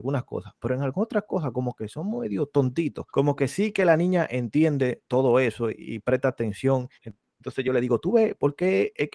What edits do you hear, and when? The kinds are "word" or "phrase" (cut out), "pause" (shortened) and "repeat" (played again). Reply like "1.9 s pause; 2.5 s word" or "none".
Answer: 3.1 s pause; 7.0 s pause